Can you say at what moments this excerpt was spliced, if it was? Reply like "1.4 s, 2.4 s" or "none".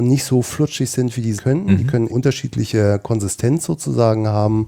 1.4 s, 2.1 s